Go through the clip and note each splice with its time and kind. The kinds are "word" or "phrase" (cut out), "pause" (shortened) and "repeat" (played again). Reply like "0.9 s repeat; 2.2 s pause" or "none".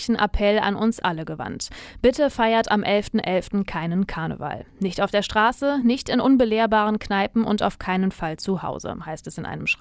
none